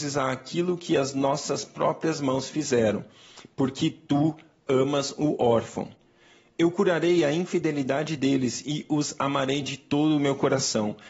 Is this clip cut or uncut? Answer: uncut